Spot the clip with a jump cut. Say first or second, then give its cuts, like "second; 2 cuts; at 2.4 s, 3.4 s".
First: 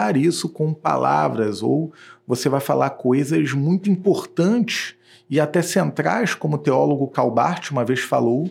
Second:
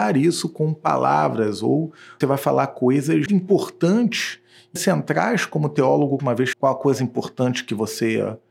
second; 6 cuts; at 2.2 s, 3.3 s, 4.8 s, 6.2 s, 6.5 s, 7.0 s